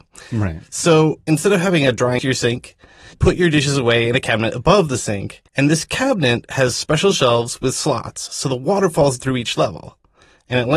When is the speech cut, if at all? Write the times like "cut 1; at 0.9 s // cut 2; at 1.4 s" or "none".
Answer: cut 1; at 2.2 s // cut 2; at 3.1 s // cut 3; at 5.5 s // cut 4; at 9.2 s

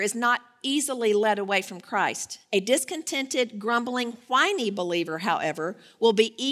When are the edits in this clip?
none

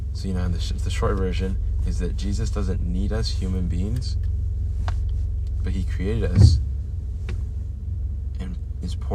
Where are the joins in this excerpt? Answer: none

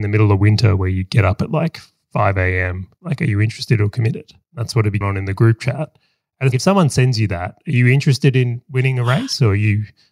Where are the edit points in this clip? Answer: cut 1; at 5.0 s // cut 2; at 6.5 s

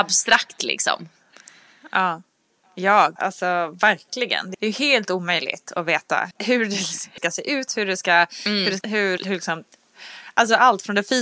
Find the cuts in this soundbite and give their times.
cut 1; at 3.2 s // cut 2; at 4.5 s // cut 3; at 6.3 s // cut 4; at 7.2 s // cut 5; at 8.8 s // cut 6; at 9.2 s

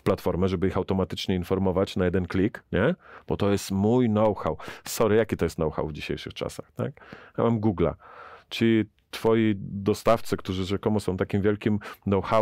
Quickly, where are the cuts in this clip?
none

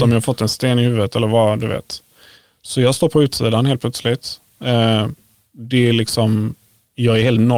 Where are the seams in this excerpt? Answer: none

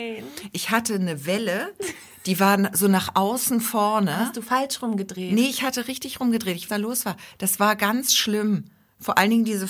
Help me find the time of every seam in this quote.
cut 1; at 6.7 s

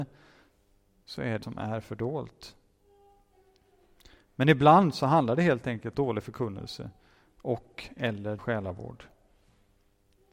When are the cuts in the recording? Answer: cut 1; at 1.4 s // cut 2; at 5.9 s // cut 3; at 8.4 s

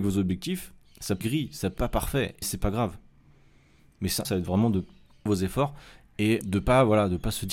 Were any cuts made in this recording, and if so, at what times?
cut 1; at 1.2 s // cut 2; at 1.8 s // cut 3; at 2.4 s // cut 4; at 4.2 s // cut 5; at 5.3 s // cut 6; at 6.4 s

